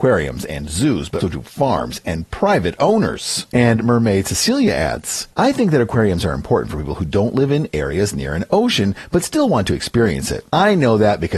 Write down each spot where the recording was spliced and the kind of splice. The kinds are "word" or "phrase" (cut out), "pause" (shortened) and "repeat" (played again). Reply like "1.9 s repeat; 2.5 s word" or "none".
1.2 s word